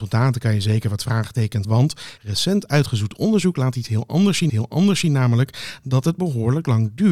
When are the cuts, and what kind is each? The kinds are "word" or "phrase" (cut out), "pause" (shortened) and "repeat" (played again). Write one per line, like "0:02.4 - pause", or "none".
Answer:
0:01.6 - word
0:02.2 - pause
0:04.5 - repeat

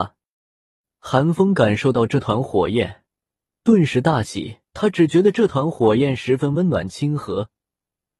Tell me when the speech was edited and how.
0:04.7 - pause

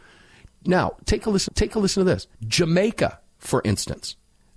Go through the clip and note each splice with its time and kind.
0:01.5 - repeat
0:02.3 - pause

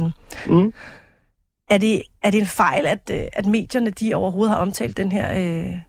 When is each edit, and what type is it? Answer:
none

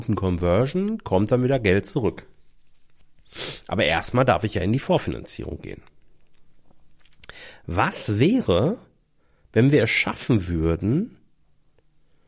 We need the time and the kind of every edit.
none

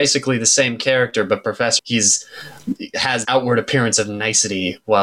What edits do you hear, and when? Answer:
0:01.8 - phrase
0:03.2 - word

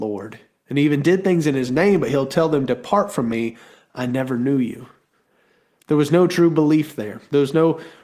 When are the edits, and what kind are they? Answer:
none

